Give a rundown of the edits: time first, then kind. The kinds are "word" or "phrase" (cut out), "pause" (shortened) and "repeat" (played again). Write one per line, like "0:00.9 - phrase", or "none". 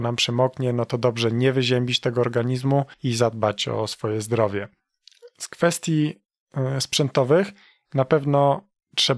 0:02.9 - pause